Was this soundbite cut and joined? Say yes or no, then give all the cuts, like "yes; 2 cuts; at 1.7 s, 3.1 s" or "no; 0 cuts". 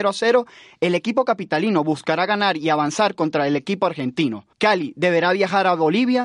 yes; 1 cut; at 4.5 s